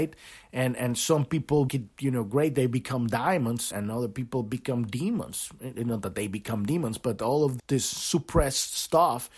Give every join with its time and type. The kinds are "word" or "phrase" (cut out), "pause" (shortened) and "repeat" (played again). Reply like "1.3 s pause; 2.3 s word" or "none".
1.7 s word; 3.7 s word; 7.6 s word